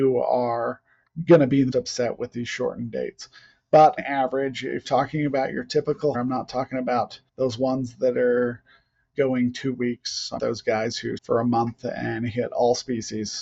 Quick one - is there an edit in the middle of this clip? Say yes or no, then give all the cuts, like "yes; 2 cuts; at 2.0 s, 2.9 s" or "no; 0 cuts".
yes; 8 cuts; at 1.7 s, 4.0 s, 4.8 s, 6.1 s, 7.3 s, 9.1 s, 10.4 s, 11.2 s